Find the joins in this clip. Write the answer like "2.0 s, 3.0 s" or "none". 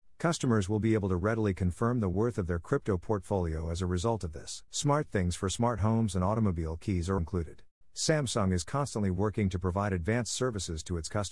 4.7 s, 7.2 s, 7.8 s